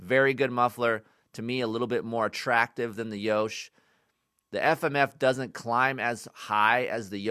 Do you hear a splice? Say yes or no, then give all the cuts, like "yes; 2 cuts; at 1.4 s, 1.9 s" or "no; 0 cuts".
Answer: no; 0 cuts